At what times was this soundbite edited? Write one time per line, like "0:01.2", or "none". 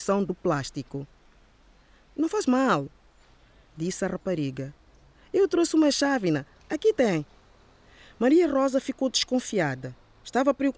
none

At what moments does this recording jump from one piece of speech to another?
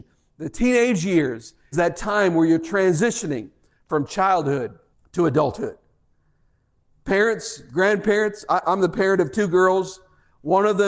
0:01.7
0:04.9
0:08.6

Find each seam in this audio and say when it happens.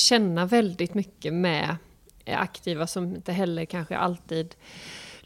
none

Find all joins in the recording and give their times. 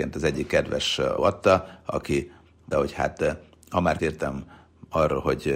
0:01.2
0:02.7
0:04.0

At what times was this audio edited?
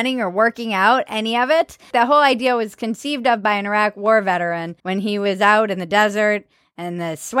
0:04.8

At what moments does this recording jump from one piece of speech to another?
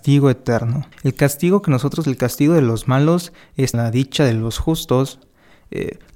0:00.9
0:02.0
0:03.7

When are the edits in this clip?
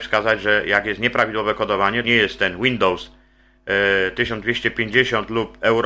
0:02.0

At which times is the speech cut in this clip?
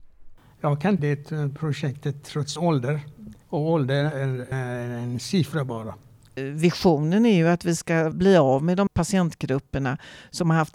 0:01.0
0:02.6
0:03.4
0:04.5
0:08.1
0:08.9

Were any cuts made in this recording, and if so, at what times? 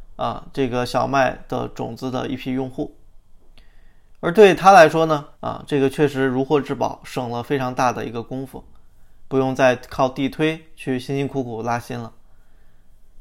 0:05.3

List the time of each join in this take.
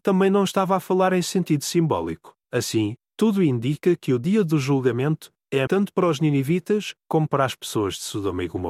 0:02.4
0:05.7

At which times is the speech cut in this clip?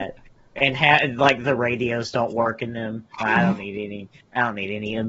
0:03.1

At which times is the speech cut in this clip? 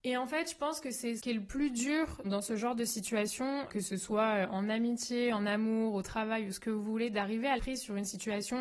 0:01.2
0:02.2
0:03.7
0:07.6

